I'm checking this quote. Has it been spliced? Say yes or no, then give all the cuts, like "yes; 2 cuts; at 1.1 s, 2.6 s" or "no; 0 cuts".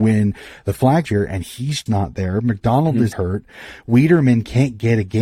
yes; 3 cuts; at 1.0 s, 1.9 s, 3.1 s